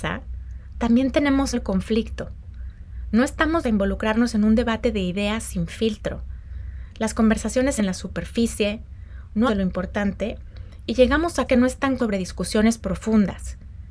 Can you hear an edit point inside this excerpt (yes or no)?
yes